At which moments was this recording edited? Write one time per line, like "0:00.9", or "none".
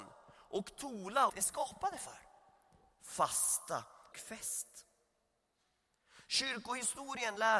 0:01.3
0:04.1